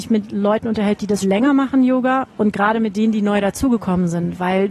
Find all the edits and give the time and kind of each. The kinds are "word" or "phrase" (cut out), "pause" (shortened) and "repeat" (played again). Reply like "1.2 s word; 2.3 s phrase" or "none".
1.2 s word